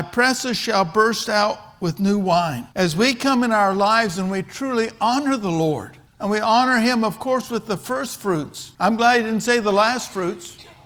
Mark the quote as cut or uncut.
cut